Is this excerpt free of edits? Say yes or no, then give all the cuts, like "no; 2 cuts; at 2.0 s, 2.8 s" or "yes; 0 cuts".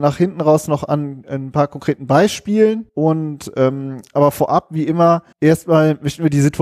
no; 2 cuts; at 2.9 s, 5.3 s